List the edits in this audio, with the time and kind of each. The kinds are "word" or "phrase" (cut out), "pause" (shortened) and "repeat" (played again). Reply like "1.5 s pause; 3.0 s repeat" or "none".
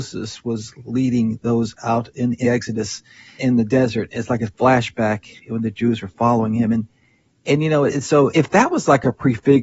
2.4 s word; 3.4 s word; 8.3 s word